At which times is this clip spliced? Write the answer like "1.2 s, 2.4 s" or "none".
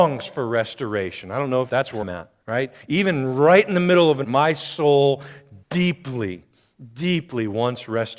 1.7 s, 2.0 s, 2.4 s, 4.2 s, 5.6 s